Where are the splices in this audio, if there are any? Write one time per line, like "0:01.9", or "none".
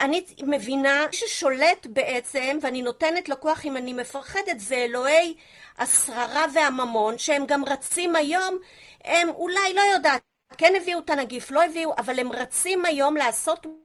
0:01.1